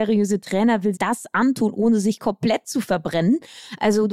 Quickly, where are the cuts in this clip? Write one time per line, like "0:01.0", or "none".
0:00.9